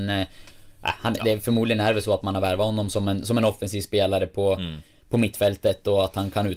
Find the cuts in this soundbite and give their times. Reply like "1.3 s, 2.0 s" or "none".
none